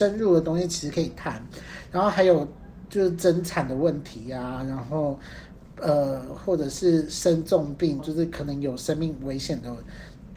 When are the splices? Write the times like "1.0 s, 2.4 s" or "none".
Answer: 8.0 s